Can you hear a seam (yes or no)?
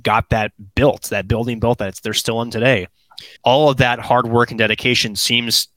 yes